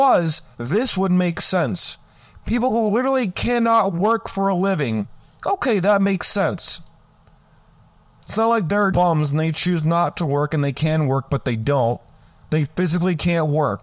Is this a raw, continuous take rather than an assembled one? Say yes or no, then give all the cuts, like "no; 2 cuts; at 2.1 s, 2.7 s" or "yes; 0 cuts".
no; 1 cut; at 8.9 s